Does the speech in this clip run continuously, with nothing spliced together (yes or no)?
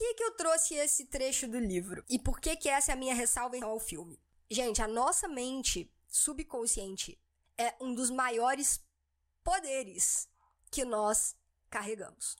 no